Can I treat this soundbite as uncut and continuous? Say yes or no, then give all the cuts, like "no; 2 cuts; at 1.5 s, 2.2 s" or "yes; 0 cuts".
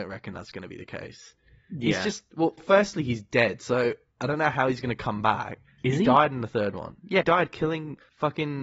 no; 2 cuts; at 2.6 s, 7.2 s